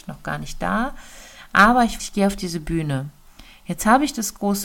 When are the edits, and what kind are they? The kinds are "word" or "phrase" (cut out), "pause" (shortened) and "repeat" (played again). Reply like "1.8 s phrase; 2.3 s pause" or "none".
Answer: 2.0 s word

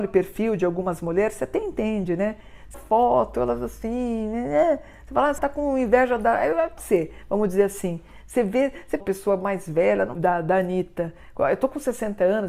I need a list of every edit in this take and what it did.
2.7 s phrase; 5.4 s word; 6.8 s word; 9.0 s phrase; 10.2 s phrase

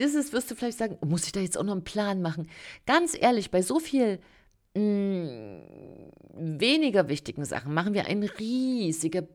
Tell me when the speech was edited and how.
none

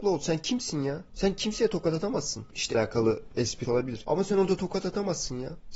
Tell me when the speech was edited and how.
2.7 s phrase; 3.6 s word

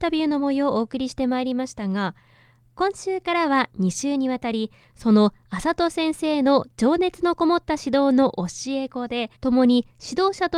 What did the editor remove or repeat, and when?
9.3 s pause

